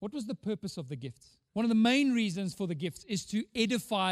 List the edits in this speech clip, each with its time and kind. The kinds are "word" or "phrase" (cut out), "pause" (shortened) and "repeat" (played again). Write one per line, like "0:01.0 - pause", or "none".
0:01.5 - pause